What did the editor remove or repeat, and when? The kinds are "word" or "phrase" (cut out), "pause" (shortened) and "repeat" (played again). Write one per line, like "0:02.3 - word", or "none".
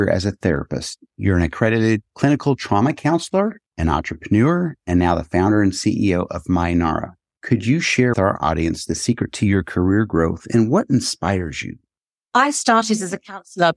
0:08.1 - word